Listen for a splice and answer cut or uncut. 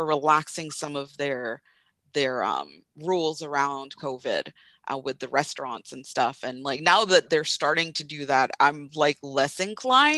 uncut